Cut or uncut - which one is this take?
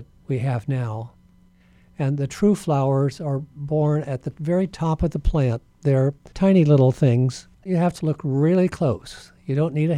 cut